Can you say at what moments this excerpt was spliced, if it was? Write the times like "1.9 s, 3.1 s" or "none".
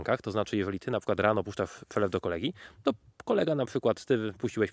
none

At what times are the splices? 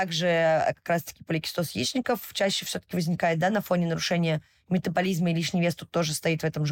none

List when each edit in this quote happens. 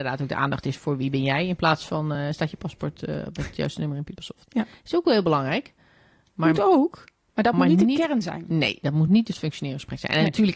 none

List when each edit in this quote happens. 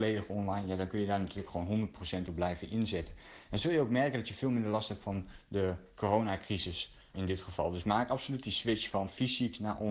7.1 s

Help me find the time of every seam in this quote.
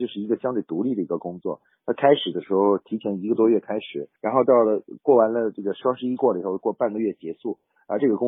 4.2 s

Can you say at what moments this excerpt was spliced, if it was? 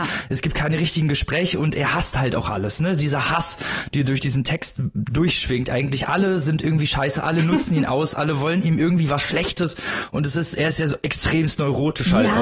none

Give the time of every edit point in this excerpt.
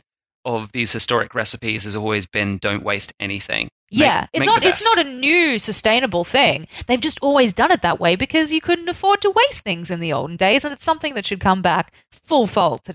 none

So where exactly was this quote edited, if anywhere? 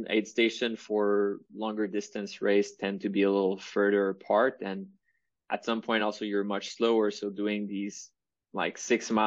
none

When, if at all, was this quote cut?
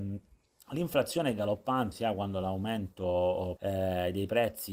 1.9 s, 3.6 s

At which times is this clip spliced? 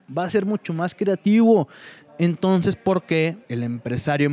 3.4 s

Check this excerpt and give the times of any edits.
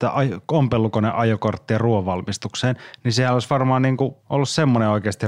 4.2 s

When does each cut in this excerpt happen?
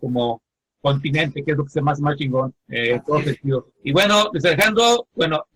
2.6 s, 3.7 s

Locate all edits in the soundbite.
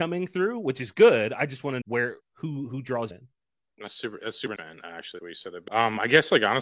1.8 s, 2.2 s, 3.1 s, 4.6 s, 5.2 s, 5.7 s

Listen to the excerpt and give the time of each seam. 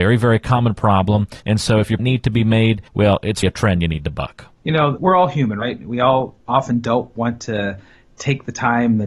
1.4 s, 2.0 s, 2.9 s, 3.4 s, 5.0 s

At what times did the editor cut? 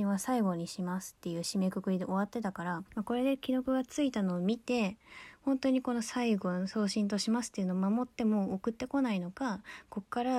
2.9 s

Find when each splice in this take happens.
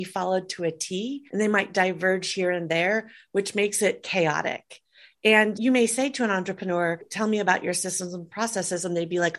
1.3 s

